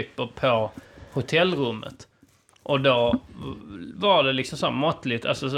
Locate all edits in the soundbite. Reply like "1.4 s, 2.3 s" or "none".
none